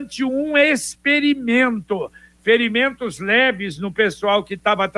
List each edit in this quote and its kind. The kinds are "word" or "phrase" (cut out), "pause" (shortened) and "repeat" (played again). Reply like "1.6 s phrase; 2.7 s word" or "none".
none